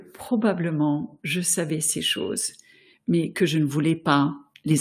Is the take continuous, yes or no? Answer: yes